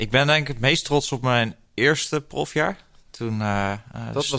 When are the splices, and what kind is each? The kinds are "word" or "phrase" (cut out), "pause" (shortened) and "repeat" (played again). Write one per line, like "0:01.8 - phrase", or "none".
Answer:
none